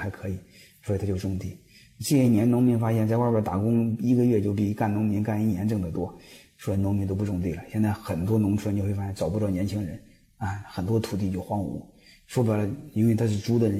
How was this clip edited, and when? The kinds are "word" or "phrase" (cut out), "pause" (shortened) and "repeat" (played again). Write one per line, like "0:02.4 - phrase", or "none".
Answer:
none